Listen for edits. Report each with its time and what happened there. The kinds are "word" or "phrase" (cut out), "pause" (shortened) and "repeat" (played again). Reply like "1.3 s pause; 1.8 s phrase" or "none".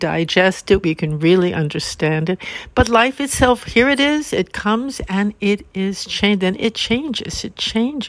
none

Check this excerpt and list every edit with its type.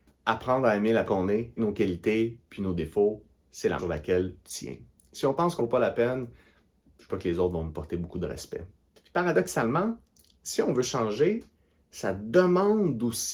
1.1 s word; 1.6 s word; 3.8 s word; 4.4 s word; 5.6 s word; 7.1 s word

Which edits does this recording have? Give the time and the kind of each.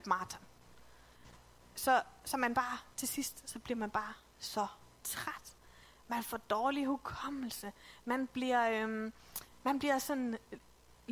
none

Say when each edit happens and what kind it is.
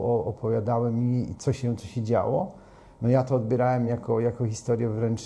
none

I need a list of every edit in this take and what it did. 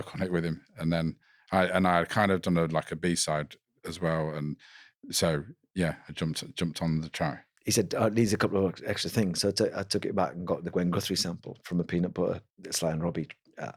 none

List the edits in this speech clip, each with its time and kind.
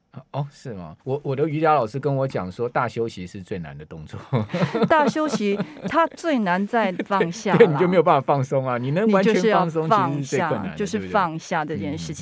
1.0 s pause

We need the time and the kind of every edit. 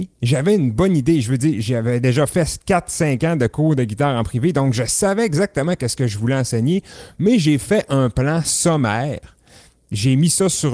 none

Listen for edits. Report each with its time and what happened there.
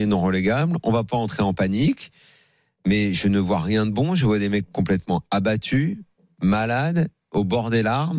none

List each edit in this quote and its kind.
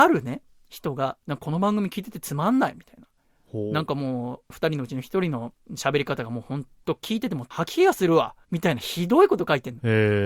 8.4 s pause

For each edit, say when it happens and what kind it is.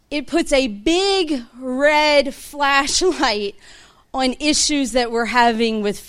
none

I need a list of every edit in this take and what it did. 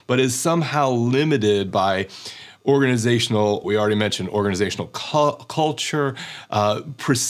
3.6 s word

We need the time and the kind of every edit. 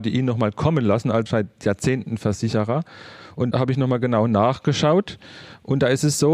1.3 s word; 3.5 s word

